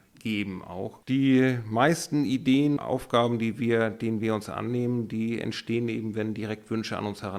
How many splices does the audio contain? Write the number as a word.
two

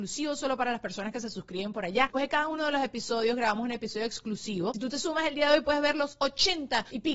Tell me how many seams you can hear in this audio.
zero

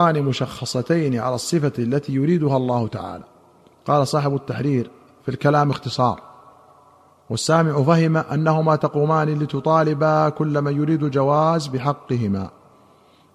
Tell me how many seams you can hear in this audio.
zero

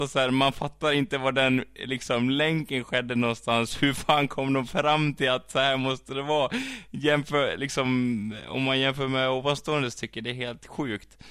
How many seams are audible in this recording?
zero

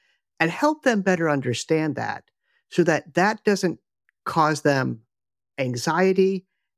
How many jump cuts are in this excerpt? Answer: zero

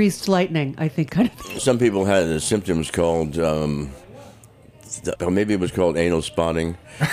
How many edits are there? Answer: three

